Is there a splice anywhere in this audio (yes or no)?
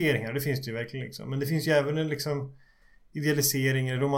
no